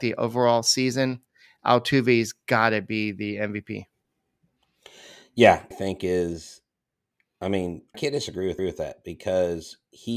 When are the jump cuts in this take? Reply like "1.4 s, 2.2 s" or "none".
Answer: 5.7 s, 7.9 s, 8.6 s